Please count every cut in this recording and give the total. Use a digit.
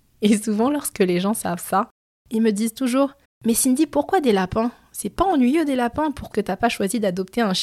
2